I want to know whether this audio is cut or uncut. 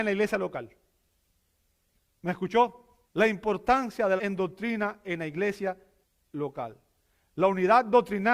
cut